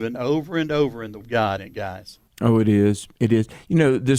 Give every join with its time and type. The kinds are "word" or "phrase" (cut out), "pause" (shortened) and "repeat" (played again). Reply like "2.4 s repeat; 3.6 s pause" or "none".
1.2 s word; 1.6 s word; 2.3 s pause